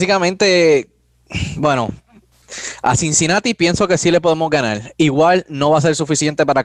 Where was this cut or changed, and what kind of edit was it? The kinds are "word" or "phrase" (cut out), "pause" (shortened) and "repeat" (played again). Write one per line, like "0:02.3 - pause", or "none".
none